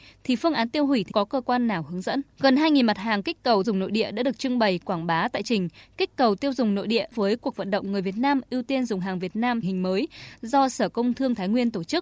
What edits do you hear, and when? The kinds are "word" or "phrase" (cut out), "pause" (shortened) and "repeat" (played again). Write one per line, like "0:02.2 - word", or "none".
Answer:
0:01.1 - phrase
0:02.3 - pause
0:03.6 - word
0:05.4 - word
0:07.1 - word
0:09.6 - phrase